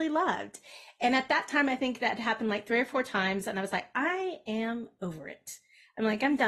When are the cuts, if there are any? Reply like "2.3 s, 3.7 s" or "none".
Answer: none